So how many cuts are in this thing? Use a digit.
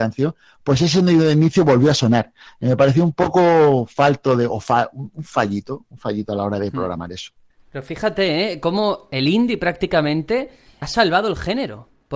1